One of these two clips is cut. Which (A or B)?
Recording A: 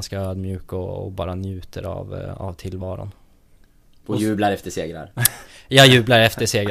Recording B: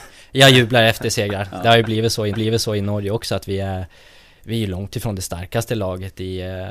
B